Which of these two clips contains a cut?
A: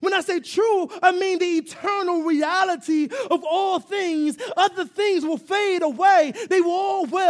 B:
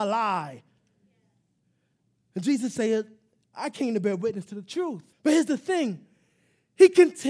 B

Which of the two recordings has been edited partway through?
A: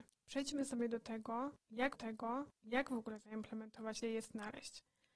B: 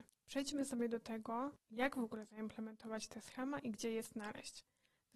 A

